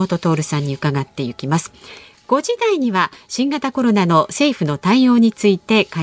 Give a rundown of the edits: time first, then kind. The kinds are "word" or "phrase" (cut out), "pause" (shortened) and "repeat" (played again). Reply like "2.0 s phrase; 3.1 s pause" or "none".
none